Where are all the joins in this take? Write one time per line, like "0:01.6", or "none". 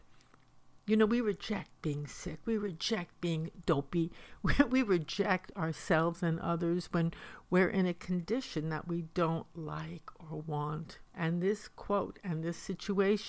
0:11.1